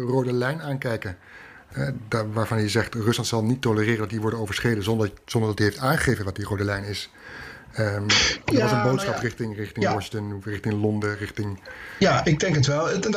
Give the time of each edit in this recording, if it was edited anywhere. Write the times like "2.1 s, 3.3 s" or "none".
none